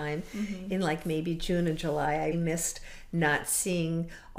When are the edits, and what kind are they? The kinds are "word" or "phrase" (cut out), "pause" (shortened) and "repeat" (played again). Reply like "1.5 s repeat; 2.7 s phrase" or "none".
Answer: 2.3 s word